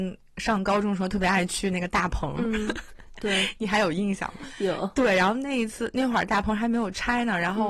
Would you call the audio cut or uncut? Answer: uncut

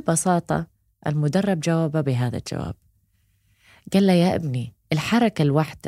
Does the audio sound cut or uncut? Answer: cut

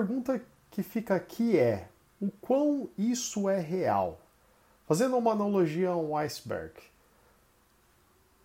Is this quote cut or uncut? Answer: uncut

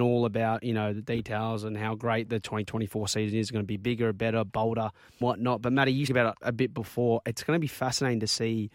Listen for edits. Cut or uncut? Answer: cut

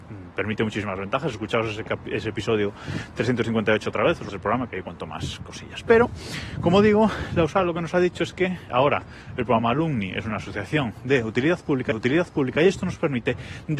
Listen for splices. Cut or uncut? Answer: cut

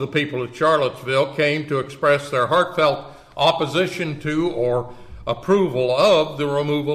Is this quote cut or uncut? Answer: uncut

